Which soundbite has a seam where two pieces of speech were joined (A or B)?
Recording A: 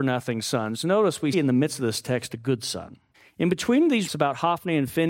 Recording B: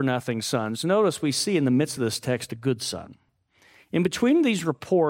A